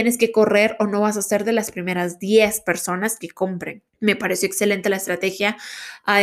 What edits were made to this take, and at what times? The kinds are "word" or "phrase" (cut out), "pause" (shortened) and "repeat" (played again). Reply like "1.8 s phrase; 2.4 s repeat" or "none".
3.9 s pause